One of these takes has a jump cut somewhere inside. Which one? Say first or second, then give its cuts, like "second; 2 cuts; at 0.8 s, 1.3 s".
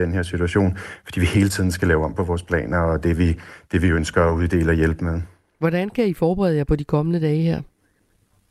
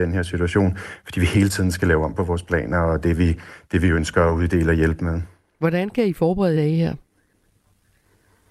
second; 1 cut; at 6.5 s